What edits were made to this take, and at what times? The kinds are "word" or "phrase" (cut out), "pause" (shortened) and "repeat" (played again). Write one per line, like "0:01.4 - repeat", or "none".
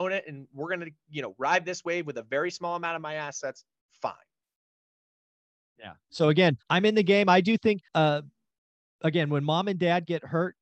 0:06.6 - pause
0:07.9 - pause